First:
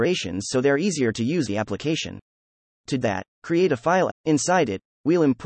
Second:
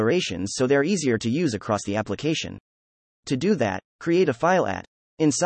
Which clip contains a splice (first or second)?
first